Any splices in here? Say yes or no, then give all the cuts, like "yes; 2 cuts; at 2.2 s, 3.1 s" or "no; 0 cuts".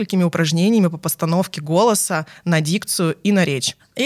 no; 0 cuts